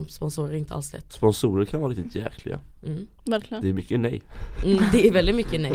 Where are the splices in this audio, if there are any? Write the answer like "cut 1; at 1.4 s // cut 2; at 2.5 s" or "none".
cut 1; at 3.2 s